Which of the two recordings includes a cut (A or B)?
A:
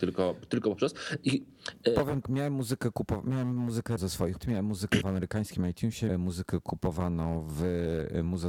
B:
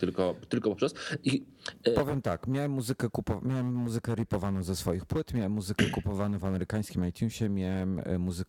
A